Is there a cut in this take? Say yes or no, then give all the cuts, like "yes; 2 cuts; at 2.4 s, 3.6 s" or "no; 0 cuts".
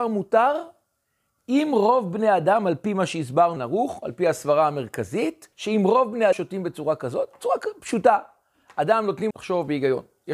yes; 4 cuts; at 3.6 s, 5.5 s, 6.3 s, 9.3 s